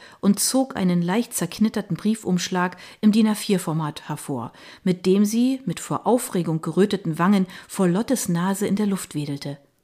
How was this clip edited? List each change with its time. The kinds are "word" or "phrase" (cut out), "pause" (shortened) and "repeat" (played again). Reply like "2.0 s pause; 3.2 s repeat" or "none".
none